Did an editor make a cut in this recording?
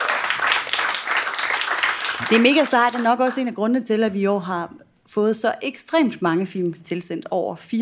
no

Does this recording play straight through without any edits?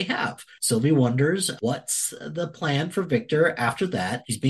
yes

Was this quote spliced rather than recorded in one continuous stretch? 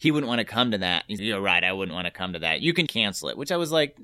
yes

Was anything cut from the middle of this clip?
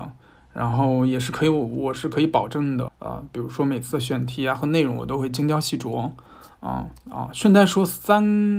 yes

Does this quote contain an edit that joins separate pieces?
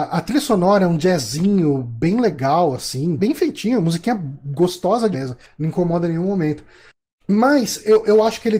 yes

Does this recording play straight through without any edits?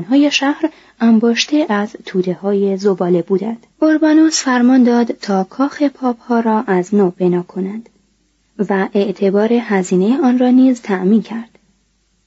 no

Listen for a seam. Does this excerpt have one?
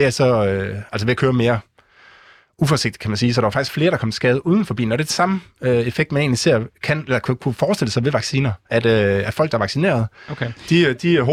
no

